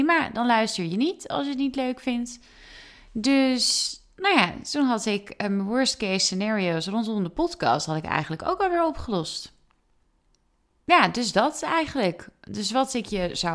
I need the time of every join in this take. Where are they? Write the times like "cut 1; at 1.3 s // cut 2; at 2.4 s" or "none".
none

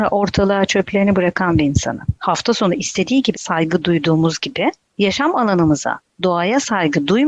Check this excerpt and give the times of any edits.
cut 1; at 2.2 s // cut 2; at 3.3 s

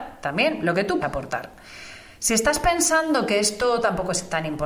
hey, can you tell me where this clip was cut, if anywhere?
cut 1; at 1.0 s

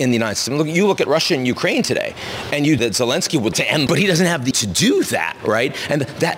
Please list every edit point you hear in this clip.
cut 1; at 2.8 s // cut 2; at 3.5 s // cut 3; at 3.9 s // cut 4; at 4.5 s

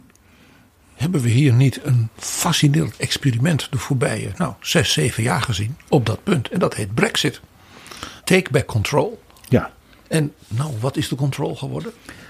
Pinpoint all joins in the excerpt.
cut 1; at 2.1 s // cut 2; at 8.2 s // cut 3; at 10.4 s

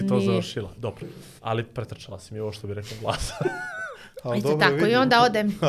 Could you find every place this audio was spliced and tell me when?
cut 1; at 1.4 s

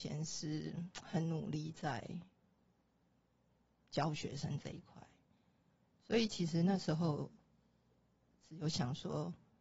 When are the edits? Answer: none

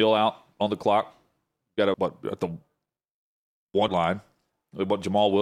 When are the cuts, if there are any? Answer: cut 1; at 1.9 s // cut 2; at 3.9 s

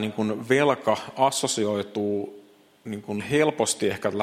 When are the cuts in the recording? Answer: cut 1; at 3.2 s

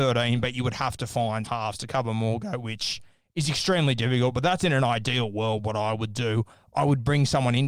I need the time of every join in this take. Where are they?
cut 1; at 1.4 s

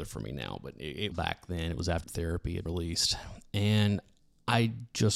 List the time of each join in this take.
cut 1; at 1.1 s // cut 2; at 2.0 s // cut 3; at 2.7 s

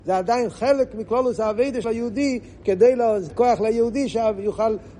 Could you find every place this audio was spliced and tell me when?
cut 1; at 1.8 s // cut 2; at 3.3 s

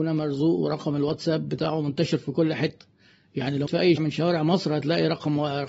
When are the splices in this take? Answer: cut 1; at 3.7 s // cut 2; at 4.0 s

